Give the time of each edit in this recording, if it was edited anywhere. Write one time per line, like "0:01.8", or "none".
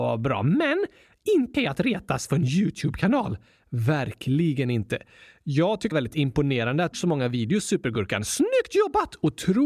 0:01.5
0:05.9
0:06.9